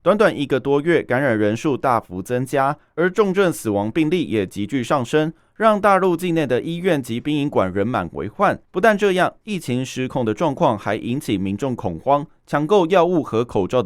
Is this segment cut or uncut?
cut